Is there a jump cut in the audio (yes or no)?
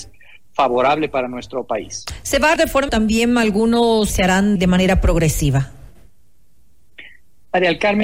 yes